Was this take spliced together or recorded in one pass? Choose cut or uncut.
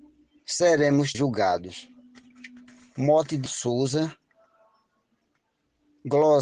cut